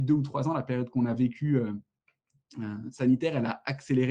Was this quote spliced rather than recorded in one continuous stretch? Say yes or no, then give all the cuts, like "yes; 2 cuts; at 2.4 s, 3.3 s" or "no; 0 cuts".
no; 0 cuts